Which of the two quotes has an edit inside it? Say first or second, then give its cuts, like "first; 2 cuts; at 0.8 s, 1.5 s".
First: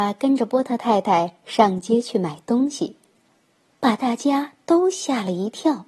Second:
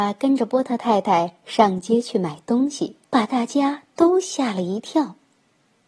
second; 1 cut; at 3.0 s